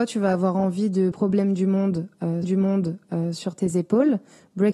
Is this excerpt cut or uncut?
cut